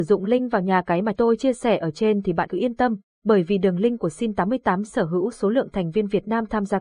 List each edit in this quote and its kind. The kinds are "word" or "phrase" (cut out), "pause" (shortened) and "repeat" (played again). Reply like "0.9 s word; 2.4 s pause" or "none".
1.1 s word; 2.5 s word